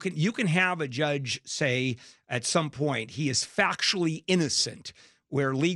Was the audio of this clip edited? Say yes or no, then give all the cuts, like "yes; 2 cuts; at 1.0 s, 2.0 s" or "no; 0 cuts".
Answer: no; 0 cuts